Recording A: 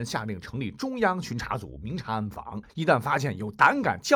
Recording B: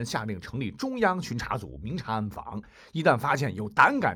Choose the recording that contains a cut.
A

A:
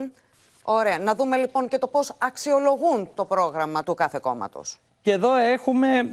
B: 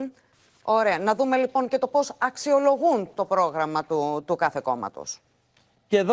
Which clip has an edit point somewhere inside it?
A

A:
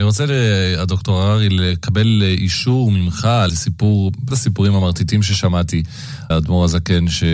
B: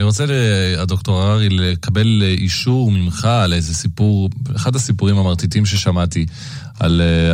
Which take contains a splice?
A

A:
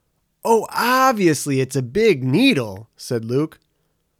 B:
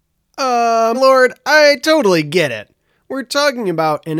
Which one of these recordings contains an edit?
B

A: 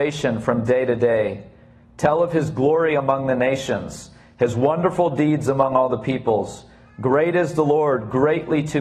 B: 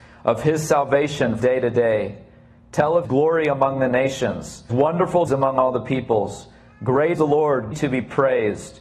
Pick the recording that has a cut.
B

